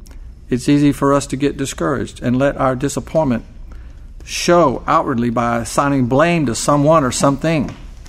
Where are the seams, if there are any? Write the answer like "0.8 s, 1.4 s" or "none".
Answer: none